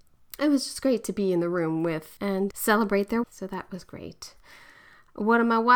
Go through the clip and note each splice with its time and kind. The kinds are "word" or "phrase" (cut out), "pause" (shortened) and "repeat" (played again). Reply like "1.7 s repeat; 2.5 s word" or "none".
2.2 s word; 2.5 s word; 3.2 s word